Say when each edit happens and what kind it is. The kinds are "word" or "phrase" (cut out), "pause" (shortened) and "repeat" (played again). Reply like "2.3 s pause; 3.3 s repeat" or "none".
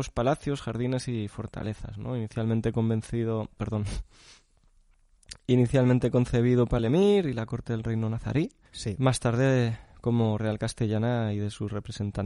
6.8 s phrase; 8.7 s pause; 10.4 s word